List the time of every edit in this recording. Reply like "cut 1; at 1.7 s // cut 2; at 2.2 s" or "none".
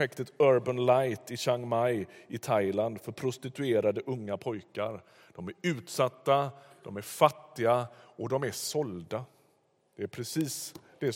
none